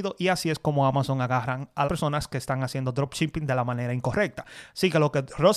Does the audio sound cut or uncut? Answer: cut